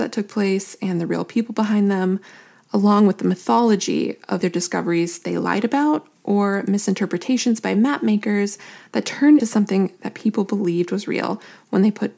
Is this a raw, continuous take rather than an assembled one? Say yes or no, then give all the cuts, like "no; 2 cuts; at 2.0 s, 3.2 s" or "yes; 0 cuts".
no; 2 cuts; at 4.4 s, 9.4 s